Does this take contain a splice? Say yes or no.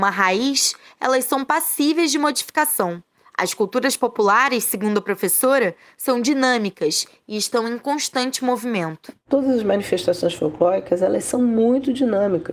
no